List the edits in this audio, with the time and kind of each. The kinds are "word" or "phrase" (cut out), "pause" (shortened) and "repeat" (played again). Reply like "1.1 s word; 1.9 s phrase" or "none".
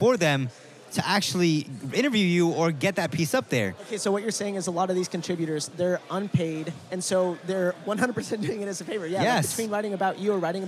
none